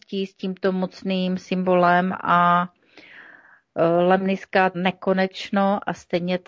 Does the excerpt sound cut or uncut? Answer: cut